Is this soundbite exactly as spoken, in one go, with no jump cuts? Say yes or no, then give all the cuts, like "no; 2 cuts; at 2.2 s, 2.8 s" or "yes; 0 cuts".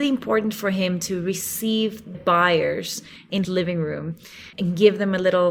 no; 3 cuts; at 2.1 s, 3.4 s, 4.5 s